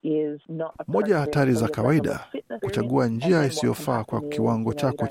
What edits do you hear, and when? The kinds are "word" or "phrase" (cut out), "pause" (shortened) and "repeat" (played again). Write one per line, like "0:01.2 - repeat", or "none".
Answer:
0:02.6 - word